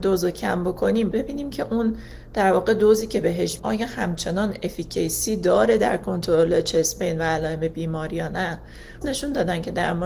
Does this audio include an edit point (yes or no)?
yes